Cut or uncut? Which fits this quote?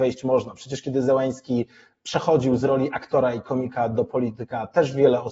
uncut